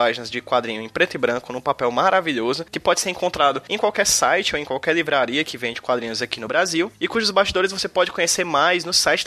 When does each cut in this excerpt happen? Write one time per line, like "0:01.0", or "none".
none